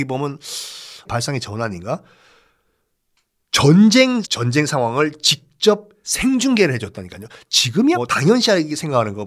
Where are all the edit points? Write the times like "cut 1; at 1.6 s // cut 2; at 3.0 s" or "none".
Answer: cut 1; at 1.0 s // cut 2; at 4.2 s // cut 3; at 6.0 s // cut 4; at 7.9 s